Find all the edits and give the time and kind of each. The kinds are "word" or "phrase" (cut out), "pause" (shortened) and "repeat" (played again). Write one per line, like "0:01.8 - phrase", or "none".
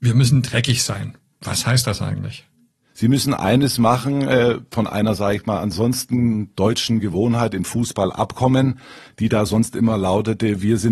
none